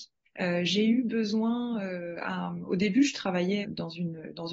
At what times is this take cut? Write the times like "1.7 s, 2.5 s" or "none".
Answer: 3.6 s